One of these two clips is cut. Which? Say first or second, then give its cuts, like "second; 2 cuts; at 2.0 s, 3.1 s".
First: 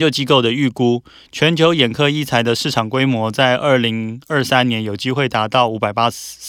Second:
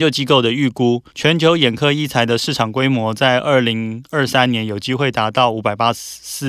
second; 1 cut; at 1.1 s